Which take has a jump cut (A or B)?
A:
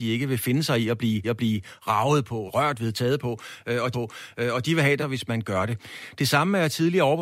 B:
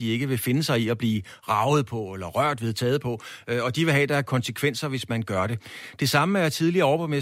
A